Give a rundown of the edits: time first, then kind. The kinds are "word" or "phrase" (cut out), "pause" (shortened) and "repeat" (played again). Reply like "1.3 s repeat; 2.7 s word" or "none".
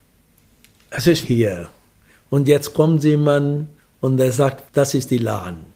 1.2 s phrase; 3.8 s pause; 4.7 s word